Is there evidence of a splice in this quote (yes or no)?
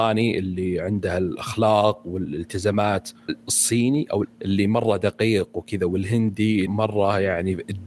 yes